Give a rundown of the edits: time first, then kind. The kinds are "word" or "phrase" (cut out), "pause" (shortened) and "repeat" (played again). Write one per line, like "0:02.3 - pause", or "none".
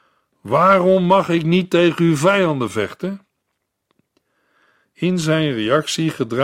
none